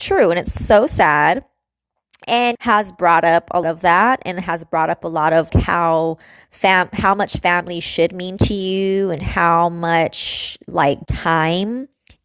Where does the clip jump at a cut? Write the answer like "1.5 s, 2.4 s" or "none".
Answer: 2.5 s, 3.6 s, 5.5 s, 11.0 s